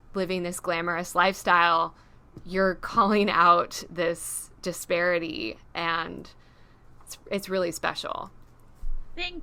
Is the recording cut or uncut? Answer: uncut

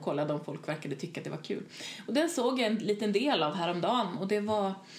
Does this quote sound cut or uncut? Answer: uncut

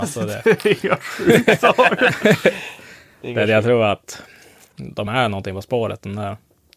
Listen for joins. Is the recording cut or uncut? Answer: uncut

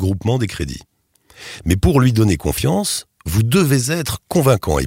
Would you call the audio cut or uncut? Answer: cut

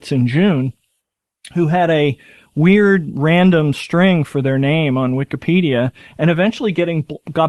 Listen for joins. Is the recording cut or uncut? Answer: uncut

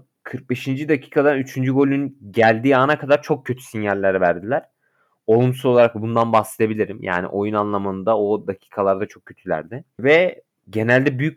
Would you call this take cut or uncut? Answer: uncut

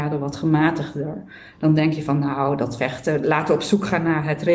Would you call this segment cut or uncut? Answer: uncut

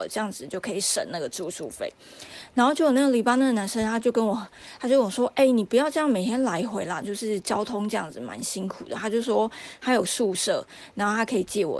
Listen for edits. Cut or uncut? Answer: uncut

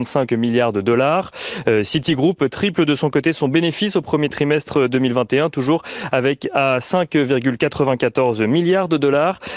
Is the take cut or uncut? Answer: uncut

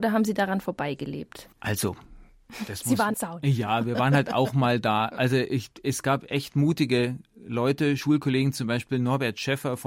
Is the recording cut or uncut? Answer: cut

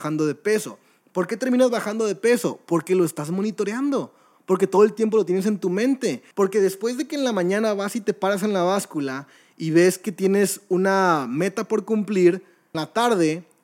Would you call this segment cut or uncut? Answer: cut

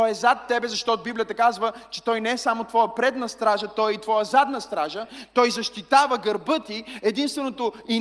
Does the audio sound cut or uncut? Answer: uncut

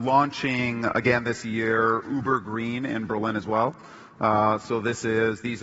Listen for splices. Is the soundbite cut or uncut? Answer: uncut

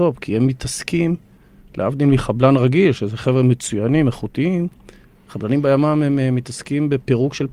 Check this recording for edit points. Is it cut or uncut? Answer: uncut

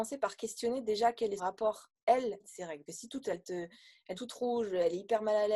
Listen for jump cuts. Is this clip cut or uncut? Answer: cut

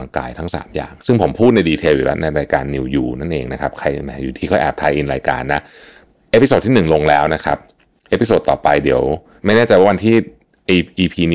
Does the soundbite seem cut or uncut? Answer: uncut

